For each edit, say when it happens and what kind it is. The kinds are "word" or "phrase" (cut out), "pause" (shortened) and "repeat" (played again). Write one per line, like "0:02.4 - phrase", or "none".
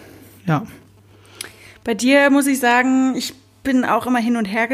none